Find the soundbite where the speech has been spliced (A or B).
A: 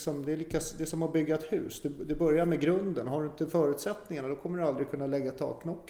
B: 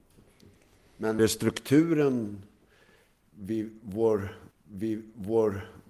B